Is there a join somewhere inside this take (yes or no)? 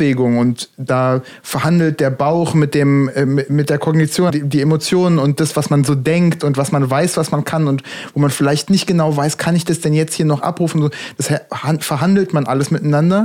yes